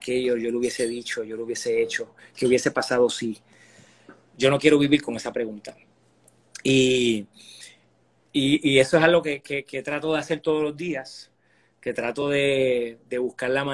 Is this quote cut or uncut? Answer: uncut